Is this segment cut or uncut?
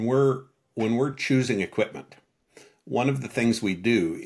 uncut